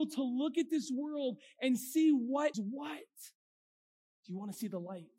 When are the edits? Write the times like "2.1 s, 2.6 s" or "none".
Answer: 2.5 s